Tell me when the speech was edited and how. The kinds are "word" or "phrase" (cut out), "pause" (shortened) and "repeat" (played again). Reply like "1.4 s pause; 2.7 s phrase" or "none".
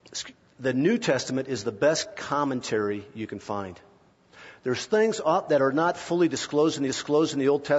6.9 s repeat